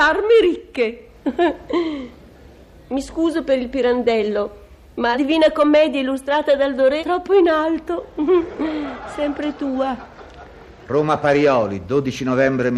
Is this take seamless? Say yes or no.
no